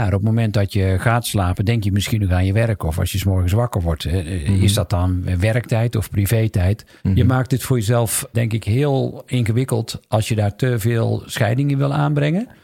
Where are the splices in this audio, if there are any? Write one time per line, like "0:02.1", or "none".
0:07.0
0:08.3